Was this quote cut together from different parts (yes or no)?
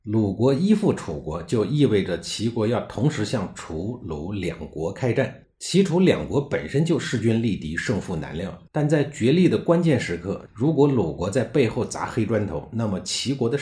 yes